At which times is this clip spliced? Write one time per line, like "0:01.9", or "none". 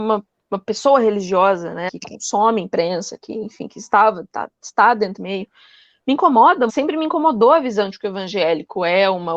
0:01.9
0:05.2
0:06.7